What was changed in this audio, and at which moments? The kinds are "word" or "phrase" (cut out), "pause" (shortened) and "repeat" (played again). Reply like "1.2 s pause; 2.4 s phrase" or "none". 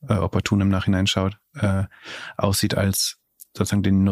none

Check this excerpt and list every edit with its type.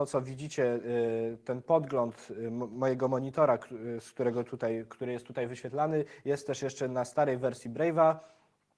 none

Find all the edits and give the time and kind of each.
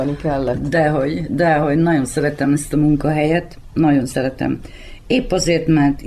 none

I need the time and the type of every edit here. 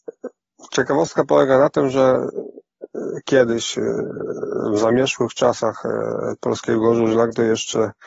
none

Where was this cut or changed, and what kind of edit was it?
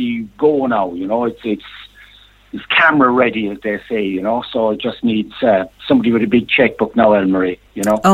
none

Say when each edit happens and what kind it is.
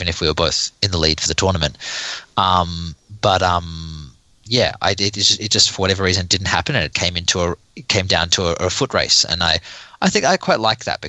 6.9 s word

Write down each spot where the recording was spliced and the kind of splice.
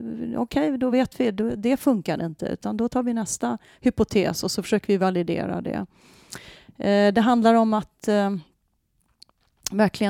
none

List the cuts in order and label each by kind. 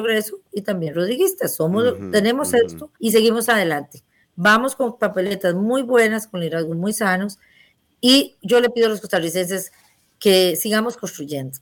3.0 s pause

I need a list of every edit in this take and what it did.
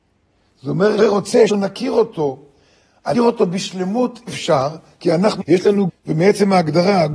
1.0 s word; 1.5 s word; 3.1 s word; 4.3 s word; 5.4 s word; 5.9 s word

